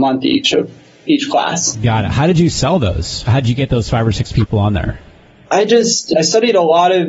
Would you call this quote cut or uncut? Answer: uncut